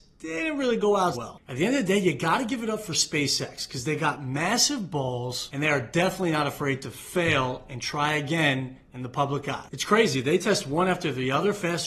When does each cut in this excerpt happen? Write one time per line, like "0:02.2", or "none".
0:01.1